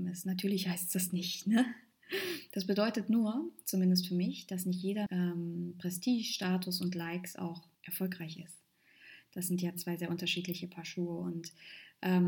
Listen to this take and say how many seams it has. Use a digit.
2